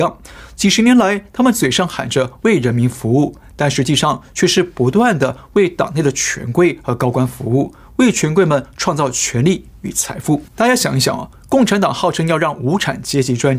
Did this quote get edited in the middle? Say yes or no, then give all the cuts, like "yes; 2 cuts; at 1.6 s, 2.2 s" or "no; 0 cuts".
yes; 1 cut; at 10.5 s